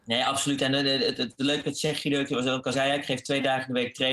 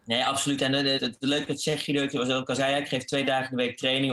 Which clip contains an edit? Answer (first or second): second